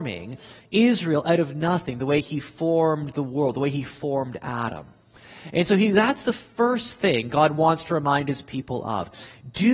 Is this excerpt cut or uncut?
uncut